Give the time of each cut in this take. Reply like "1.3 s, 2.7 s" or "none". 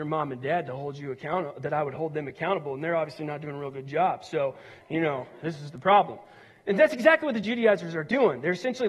none